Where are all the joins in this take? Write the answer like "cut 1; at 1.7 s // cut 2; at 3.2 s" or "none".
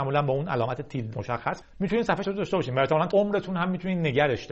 cut 1; at 1.1 s // cut 2; at 1.6 s // cut 3; at 2.2 s // cut 4; at 3.1 s